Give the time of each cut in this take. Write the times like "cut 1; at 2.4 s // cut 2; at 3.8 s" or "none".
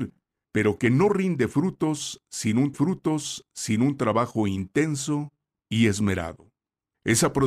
cut 1; at 2.7 s